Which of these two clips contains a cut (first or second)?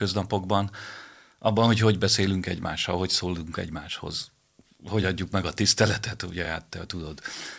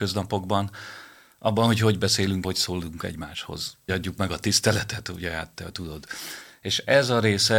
second